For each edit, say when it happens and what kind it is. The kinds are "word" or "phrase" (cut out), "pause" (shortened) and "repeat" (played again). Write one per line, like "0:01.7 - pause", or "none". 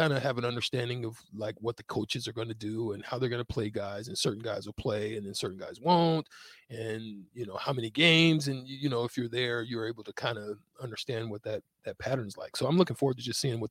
none